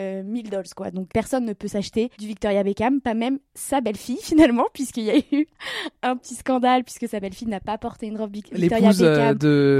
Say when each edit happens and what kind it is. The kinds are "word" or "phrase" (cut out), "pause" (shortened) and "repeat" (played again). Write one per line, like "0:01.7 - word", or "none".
0:01.1 - word
0:02.1 - pause